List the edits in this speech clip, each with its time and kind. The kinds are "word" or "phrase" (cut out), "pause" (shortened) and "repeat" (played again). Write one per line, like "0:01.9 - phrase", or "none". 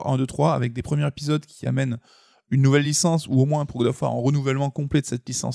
none